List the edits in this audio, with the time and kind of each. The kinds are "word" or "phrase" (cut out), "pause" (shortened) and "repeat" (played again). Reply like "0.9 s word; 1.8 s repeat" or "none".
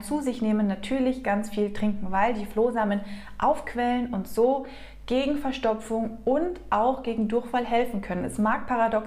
1.2 s word